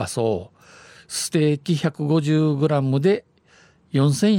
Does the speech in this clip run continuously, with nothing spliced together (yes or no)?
yes